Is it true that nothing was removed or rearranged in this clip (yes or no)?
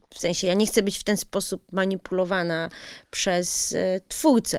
yes